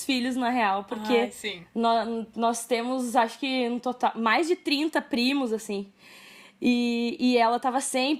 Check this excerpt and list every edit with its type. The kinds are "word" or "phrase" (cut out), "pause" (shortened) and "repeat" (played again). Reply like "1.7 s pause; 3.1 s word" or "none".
none

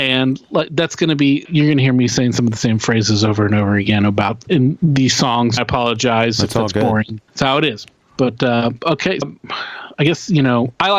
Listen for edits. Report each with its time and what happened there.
1.4 s word; 4.5 s word; 5.6 s phrase; 7.3 s pause; 8.0 s word; 9.2 s phrase

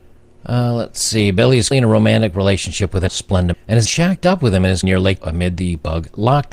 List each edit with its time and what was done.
1.7 s word; 3.1 s word; 3.5 s word; 3.9 s word; 4.8 s word; 5.2 s word

